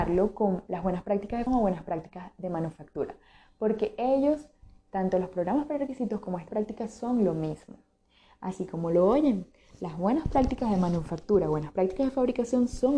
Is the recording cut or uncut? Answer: cut